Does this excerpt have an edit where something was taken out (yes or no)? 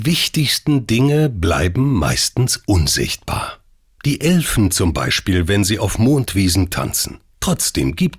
no